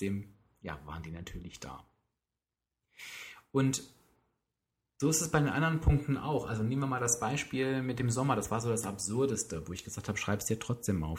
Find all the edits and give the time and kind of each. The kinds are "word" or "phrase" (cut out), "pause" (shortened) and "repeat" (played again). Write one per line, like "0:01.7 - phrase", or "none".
none